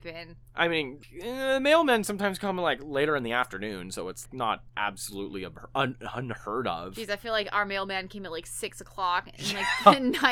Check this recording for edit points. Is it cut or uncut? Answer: cut